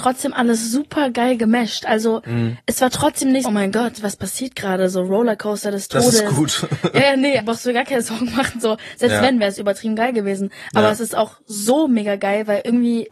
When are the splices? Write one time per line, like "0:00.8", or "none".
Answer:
0:03.4
0:07.4